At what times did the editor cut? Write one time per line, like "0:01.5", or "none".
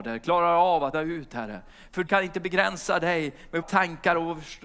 0:00.9
0:02.1
0:03.6